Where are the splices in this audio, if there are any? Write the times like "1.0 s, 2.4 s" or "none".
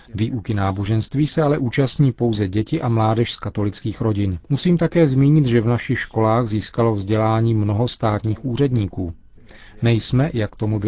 4.4 s